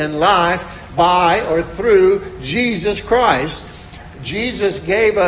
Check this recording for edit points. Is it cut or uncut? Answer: uncut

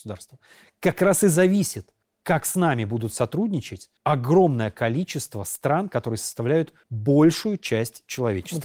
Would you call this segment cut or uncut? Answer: cut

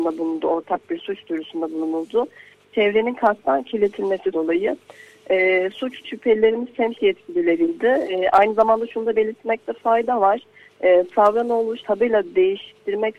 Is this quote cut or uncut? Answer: cut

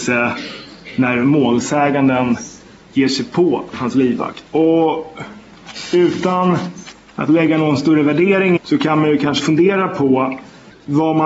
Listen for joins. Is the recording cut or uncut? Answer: cut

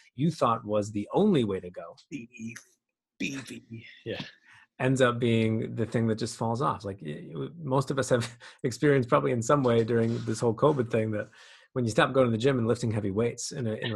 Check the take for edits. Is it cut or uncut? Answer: uncut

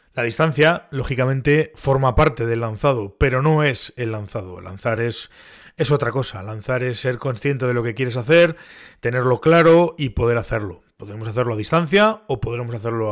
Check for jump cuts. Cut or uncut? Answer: uncut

